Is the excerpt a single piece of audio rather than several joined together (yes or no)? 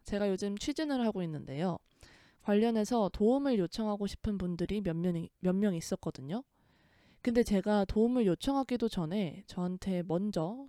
yes